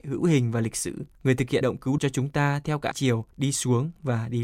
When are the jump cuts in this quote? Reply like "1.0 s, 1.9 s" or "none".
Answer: 1.1 s, 1.6 s, 2.0 s, 2.9 s, 3.3 s